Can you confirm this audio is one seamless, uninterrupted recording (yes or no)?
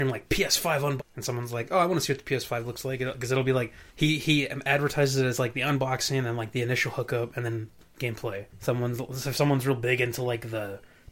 no